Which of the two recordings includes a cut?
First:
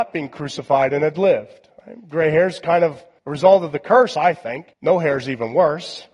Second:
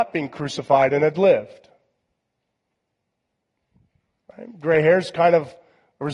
first; 3 cuts; at 1.8 s, 3.2 s, 4.7 s

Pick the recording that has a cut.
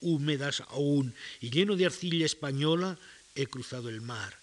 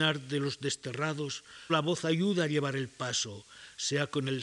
second; 1 cut; at 1.7 s

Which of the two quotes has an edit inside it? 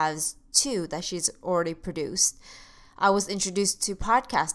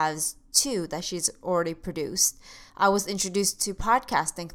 second; 1 cut; at 2.7 s

